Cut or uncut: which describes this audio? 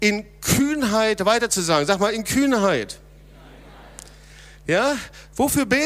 uncut